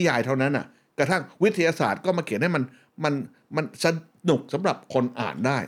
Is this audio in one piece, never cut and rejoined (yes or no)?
yes